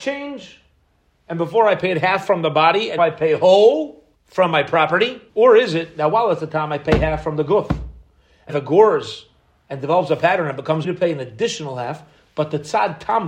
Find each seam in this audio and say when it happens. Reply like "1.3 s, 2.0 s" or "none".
3.0 s, 4.1 s, 5.3 s, 8.5 s, 10.8 s